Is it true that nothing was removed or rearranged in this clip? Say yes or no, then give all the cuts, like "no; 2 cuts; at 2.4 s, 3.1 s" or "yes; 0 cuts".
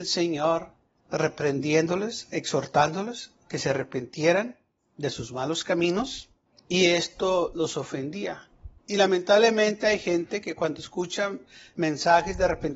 no; 1 cut; at 8.8 s